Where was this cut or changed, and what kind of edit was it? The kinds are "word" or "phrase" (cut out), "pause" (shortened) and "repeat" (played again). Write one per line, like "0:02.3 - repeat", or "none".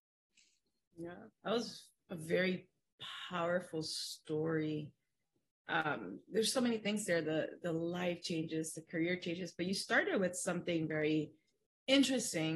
0:01.3 - pause